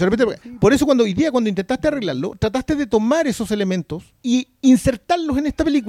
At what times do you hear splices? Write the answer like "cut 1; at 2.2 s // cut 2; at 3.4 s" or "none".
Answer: cut 1; at 4.2 s